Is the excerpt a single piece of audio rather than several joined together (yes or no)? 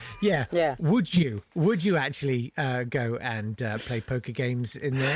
yes